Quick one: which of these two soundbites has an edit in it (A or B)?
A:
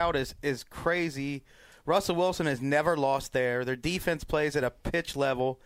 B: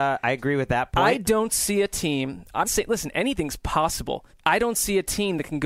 B